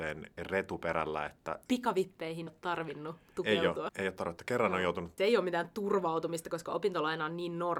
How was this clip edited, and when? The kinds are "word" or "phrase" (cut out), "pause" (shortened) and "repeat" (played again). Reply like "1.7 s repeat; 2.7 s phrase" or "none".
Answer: 2.5 s word; 3.9 s word; 5.2 s phrase